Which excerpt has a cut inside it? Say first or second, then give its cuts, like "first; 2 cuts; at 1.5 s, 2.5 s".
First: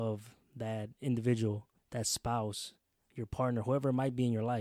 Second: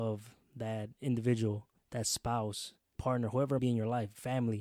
second; 2 cuts; at 2.9 s, 3.6 s